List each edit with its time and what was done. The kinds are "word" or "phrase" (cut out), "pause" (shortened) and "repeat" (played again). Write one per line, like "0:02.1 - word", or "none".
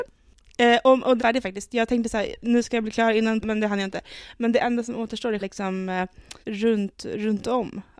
0:01.2 - phrase
0:03.4 - word
0:05.4 - word
0:06.4 - word